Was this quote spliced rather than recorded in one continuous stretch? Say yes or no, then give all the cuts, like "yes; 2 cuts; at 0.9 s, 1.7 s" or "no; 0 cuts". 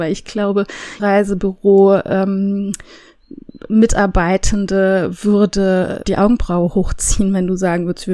yes; 2 cuts; at 1.0 s, 6.0 s